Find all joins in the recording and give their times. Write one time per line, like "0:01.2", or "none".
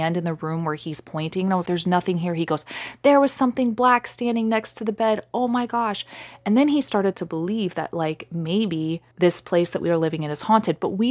0:01.7
0:09.1